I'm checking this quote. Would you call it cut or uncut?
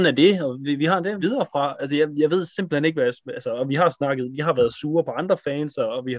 cut